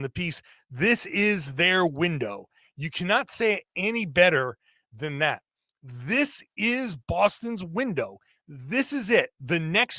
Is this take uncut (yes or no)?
yes